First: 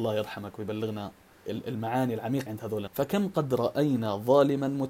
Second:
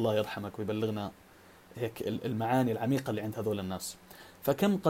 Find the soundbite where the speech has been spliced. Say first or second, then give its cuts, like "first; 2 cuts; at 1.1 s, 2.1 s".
first; 3 cuts; at 1.5 s, 2.5 s, 2.9 s